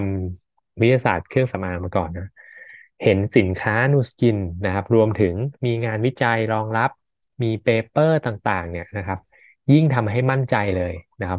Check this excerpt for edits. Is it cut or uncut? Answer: uncut